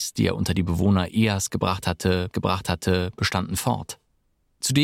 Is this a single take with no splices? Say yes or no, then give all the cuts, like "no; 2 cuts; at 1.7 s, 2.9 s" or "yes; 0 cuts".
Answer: no; 1 cut; at 2.3 s